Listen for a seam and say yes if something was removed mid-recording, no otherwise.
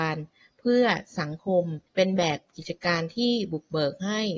yes